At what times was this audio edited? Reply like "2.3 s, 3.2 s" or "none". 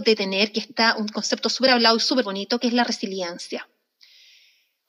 none